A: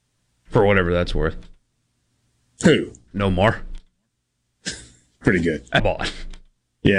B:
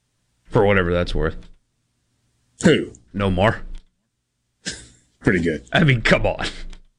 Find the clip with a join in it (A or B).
A